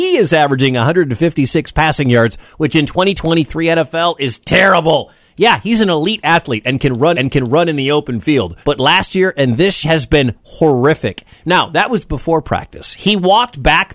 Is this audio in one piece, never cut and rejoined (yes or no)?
no